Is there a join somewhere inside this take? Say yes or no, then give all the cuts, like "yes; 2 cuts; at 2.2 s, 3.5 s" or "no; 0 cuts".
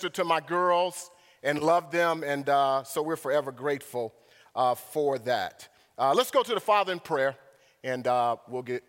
no; 0 cuts